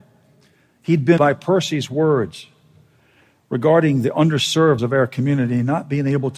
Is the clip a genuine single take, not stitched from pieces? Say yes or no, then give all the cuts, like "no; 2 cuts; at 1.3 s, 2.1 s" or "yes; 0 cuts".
no; 2 cuts; at 1.2 s, 4.8 s